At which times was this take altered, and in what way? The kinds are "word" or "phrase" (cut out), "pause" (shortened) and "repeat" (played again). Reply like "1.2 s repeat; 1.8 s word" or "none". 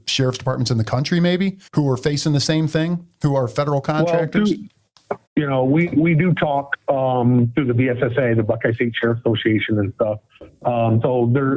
1.7 s pause; 5.3 s pause